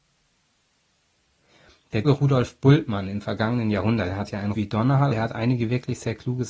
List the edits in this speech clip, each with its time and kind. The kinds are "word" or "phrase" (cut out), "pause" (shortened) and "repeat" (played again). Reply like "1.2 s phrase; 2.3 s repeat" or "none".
2.0 s word; 4.5 s word; 5.1 s word